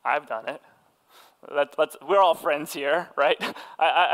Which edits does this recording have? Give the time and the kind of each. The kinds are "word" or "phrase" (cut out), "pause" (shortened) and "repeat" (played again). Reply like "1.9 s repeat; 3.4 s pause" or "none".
none